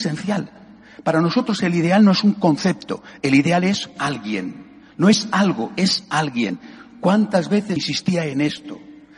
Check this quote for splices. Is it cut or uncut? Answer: cut